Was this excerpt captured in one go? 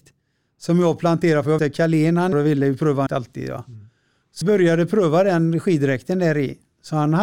no; 4 cuts; at 1.6 s, 2.3 s, 3.1 s, 4.4 s

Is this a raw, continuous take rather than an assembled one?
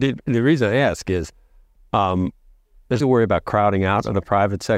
no; 1 cut; at 3.0 s

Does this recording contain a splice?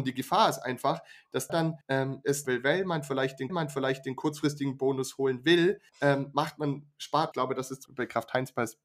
yes; 7 cuts; at 1.5 s, 1.8 s, 2.4 s, 3.5 s, 5.9 s, 7.3 s, 7.9 s

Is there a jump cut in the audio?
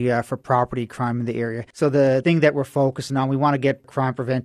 no; 0 cuts

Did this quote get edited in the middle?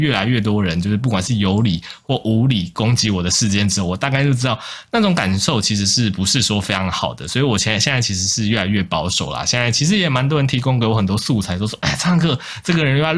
no; 0 cuts

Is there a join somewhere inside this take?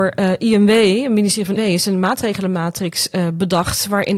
yes; 1 cut; at 1.6 s

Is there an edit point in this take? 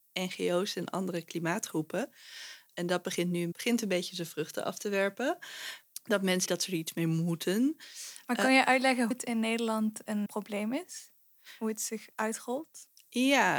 yes; 5 cuts; at 3.5 s, 6.5 s, 9.1 s, 10.3 s, 12.1 s

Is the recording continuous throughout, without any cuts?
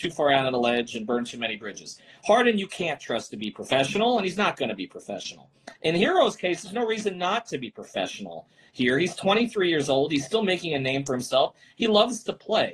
yes; 0 cuts

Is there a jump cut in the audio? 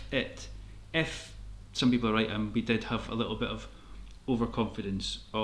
no; 0 cuts

